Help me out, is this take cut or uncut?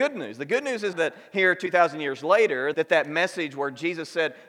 cut